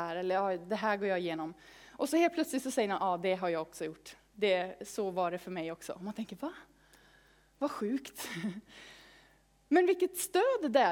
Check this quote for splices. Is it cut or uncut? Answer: uncut